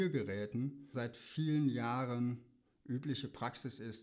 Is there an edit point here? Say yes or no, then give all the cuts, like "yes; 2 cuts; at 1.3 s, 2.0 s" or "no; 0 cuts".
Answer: yes; 1 cut; at 0.9 s